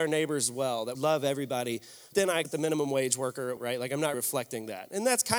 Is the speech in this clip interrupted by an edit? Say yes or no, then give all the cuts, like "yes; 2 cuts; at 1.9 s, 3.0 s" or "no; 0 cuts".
yes; 5 cuts; at 0.9 s, 2.1 s, 2.4 s, 3.6 s, 4.1 s